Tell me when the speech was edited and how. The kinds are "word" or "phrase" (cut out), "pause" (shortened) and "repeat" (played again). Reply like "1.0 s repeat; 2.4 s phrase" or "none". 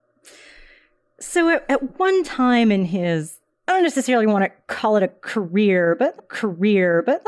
6.2 s repeat